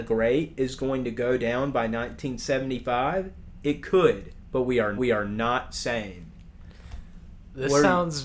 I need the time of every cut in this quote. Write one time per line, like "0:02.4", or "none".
0:05.0